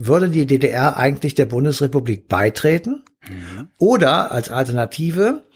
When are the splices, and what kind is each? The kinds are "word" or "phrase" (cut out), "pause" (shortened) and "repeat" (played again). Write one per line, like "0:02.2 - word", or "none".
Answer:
none